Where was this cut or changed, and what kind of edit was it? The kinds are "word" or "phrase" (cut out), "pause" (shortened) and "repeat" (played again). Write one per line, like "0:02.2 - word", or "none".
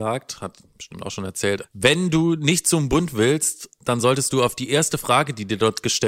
0:01.6 - word